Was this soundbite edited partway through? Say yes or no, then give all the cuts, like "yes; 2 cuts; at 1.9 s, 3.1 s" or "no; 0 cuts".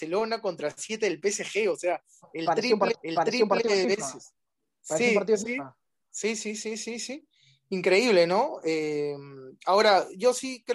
yes; 1 cut; at 2.9 s